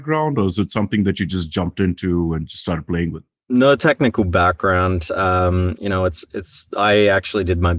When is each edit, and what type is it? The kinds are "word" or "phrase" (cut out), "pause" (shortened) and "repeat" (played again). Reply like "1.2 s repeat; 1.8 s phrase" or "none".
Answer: none